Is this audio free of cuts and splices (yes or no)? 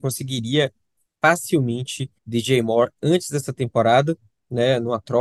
no